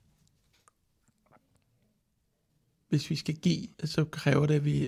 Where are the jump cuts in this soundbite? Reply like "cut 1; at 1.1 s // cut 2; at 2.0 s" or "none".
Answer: cut 1; at 3.7 s